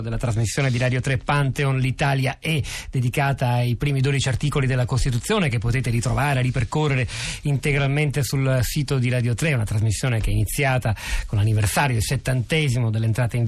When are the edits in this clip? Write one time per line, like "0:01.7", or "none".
none

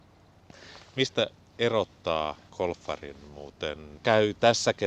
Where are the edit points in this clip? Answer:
0:02.5
0:04.0

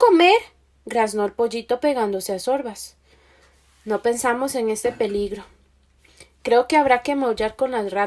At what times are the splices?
none

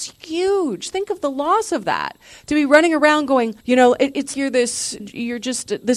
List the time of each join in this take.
0:03.6
0:04.3
0:05.0

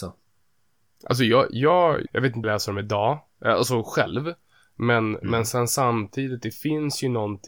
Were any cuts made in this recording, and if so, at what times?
0:02.1
0:02.4

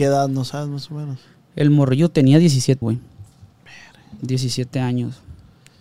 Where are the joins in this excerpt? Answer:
0:02.8

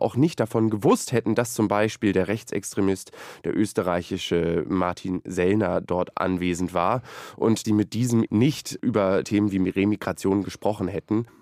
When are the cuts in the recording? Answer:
0:06.1
0:07.6
0:08.3
0:09.2

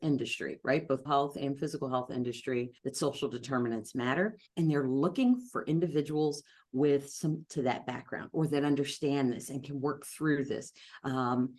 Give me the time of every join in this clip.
0:01.0
0:02.8
0:04.5
0:07.5

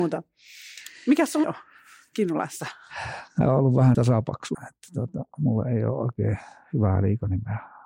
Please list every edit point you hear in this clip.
0:01.0
0:01.4
0:03.4
0:03.9
0:04.5

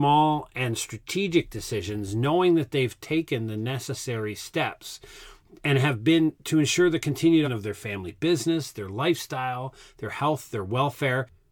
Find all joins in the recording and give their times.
0:07.4

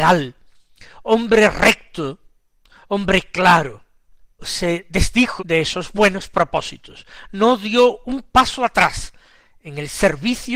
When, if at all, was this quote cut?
0:04.4
0:05.4

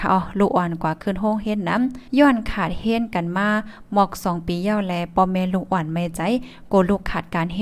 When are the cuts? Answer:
0:02.1

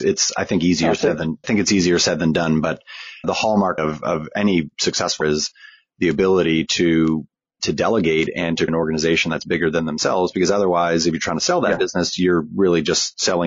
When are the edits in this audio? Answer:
0:01.4
0:03.2
0:03.8
0:05.2
0:07.6
0:08.7

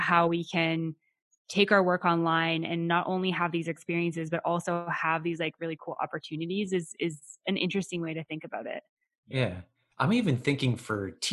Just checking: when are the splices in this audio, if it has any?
none

